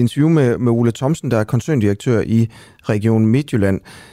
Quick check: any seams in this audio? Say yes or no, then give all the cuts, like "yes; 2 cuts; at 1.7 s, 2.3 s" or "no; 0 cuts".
no; 0 cuts